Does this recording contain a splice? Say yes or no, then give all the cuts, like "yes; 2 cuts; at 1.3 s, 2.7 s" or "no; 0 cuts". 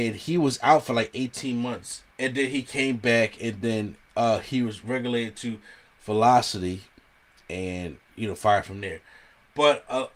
yes; 2 cuts; at 2.1 s, 8.0 s